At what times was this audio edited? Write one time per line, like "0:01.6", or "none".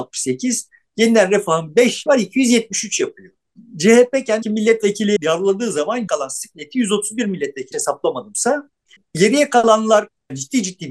0:02.1
0:04.4
0:05.2
0:06.1
0:07.7